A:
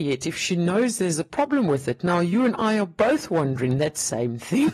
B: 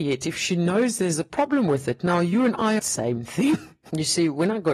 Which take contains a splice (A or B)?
B